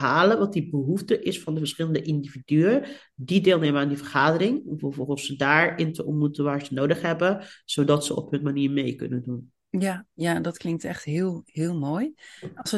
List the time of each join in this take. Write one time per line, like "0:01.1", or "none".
0:09.6